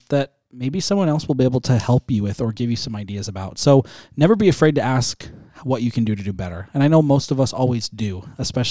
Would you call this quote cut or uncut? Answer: uncut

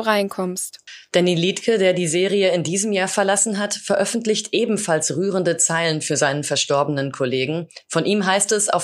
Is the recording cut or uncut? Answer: uncut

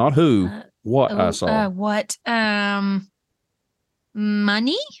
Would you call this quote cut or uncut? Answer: uncut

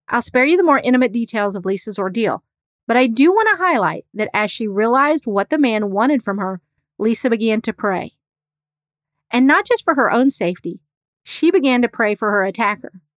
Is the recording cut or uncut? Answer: uncut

